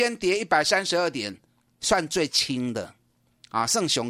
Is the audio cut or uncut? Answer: uncut